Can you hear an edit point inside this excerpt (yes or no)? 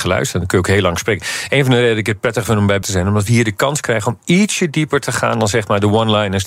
yes